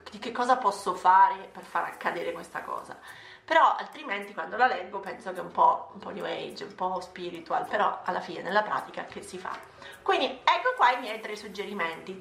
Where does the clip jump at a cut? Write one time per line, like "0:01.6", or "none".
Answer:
none